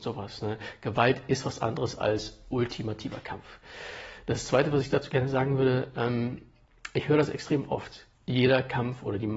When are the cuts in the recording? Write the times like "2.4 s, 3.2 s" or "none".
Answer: 8.1 s

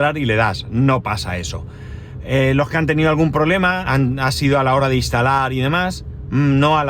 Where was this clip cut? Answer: 3.8 s

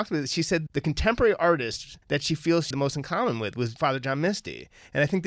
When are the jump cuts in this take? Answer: 2.0 s, 2.7 s

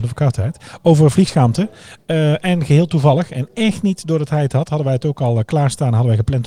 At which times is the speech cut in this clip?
none

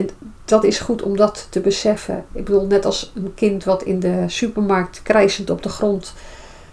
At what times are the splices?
none

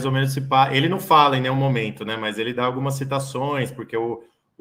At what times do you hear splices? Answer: none

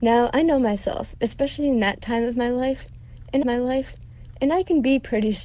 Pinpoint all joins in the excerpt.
3.4 s

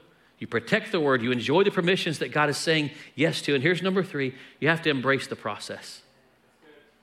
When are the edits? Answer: none

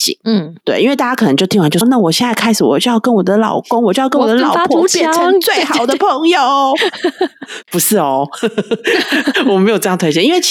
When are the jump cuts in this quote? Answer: 1.8 s

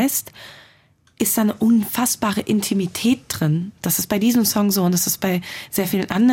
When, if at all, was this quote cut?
none

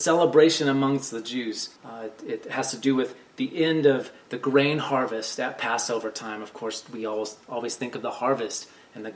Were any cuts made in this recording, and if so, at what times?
1.8 s

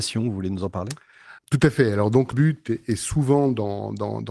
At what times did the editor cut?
1.4 s, 2.3 s

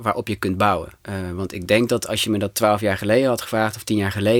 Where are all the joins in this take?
1.0 s

